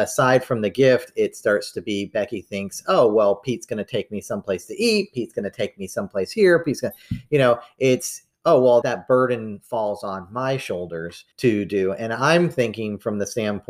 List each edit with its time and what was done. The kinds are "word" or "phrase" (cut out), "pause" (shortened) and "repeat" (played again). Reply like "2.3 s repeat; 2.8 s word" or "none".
8.8 s word; 11.3 s pause